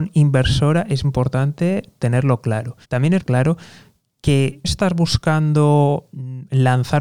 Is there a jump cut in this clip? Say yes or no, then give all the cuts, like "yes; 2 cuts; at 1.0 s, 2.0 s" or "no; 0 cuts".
yes; 4 cuts; at 1.0 s, 2.8 s, 3.2 s, 4.6 s